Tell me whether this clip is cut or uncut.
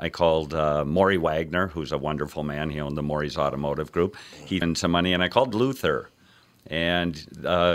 cut